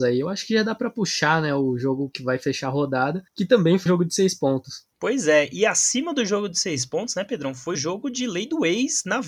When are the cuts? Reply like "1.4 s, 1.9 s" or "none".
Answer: 3.3 s, 3.9 s, 4.9 s, 7.7 s